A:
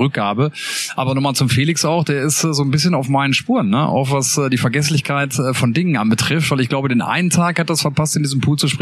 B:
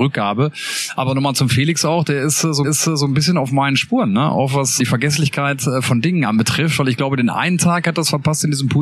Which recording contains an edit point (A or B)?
B